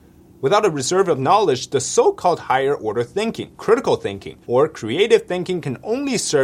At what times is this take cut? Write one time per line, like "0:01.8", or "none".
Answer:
0:03.5
0:04.4